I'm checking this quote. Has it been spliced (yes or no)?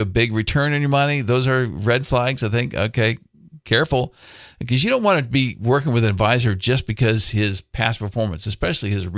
no